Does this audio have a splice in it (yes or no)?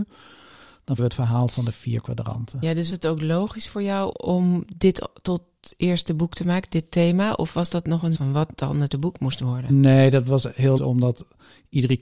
yes